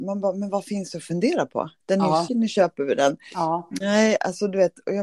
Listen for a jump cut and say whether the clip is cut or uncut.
cut